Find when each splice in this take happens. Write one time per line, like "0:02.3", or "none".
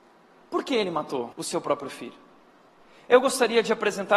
0:01.3